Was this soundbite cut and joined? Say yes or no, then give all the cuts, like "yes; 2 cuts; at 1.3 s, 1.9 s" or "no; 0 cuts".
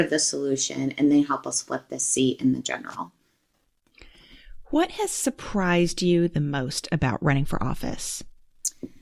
no; 0 cuts